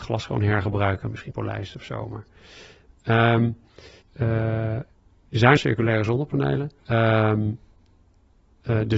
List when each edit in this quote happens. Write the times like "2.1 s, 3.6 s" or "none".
1.3 s, 4.0 s, 5.6 s, 6.8 s